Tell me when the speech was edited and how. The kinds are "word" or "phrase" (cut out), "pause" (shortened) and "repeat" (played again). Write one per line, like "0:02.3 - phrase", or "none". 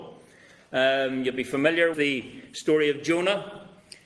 0:01.9 - word